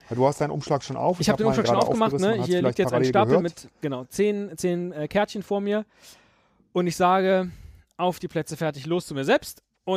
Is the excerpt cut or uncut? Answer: uncut